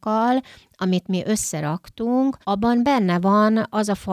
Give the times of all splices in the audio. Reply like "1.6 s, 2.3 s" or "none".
2.4 s